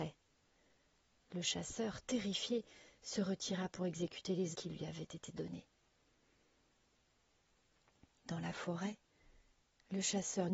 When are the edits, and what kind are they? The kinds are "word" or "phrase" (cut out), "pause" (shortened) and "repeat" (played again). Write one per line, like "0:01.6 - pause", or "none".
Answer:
0:04.5 - word